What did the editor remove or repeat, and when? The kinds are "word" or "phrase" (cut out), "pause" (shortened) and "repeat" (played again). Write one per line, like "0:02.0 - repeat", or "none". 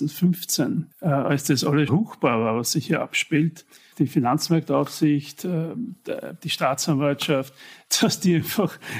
0:00.9 - pause
0:01.9 - word
0:03.9 - word

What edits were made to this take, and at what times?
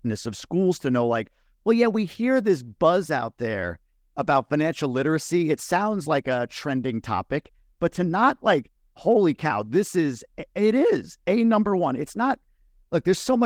none

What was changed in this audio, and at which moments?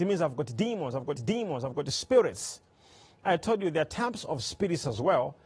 0:01.2 - repeat

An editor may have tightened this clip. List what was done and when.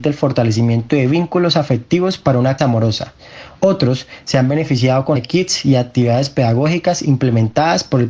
0:02.6 - word
0:05.2 - word
0:07.0 - word

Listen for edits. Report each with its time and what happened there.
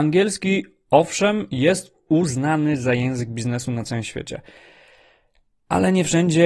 none

